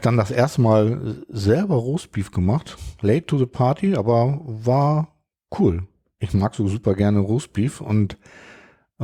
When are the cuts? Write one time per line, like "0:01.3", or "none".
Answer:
none